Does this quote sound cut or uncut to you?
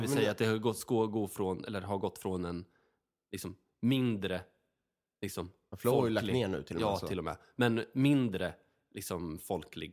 uncut